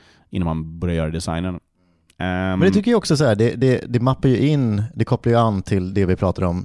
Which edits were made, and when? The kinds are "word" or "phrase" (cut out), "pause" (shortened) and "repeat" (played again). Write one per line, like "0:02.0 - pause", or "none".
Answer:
none

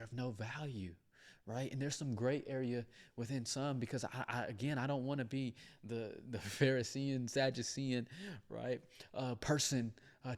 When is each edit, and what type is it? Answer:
none

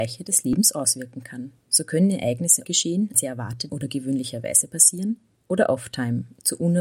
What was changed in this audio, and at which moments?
0:01.6 - pause
0:02.6 - word
0:03.1 - phrase
0:03.7 - word
0:05.3 - pause

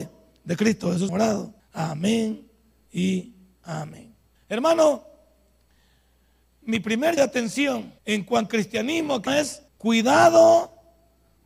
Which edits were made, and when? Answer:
0:01.1 - word
0:01.6 - pause
0:04.4 - pause
0:07.2 - word
0:08.0 - pause
0:08.5 - word
0:09.3 - word
0:09.7 - pause

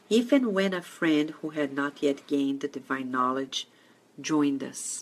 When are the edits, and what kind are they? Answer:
none

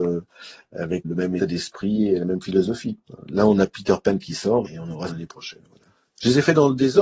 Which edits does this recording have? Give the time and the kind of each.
0:01.0 - word
0:01.4 - word
0:04.6 - word
0:05.1 - word

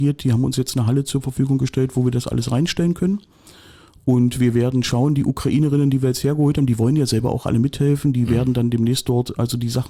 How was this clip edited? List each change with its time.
none

